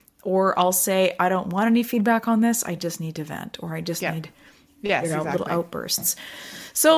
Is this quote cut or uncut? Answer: uncut